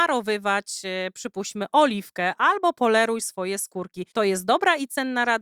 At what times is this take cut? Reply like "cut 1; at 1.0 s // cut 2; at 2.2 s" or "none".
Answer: cut 1; at 4.1 s